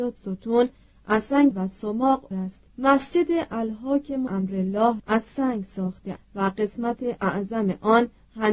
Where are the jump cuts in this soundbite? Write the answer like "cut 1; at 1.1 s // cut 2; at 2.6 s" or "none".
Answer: cut 1; at 1.5 s // cut 2; at 2.3 s // cut 3; at 2.7 s // cut 4; at 4.3 s // cut 5; at 5.0 s // cut 6; at 6.2 s